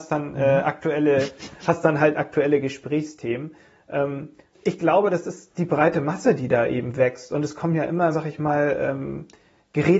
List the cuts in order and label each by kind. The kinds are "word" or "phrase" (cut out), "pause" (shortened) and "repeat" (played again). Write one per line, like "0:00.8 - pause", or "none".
0:04.5 - word
0:08.1 - word